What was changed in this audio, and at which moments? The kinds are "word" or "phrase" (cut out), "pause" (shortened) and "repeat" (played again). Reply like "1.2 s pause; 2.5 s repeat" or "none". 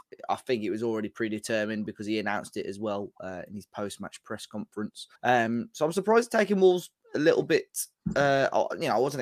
5.1 s pause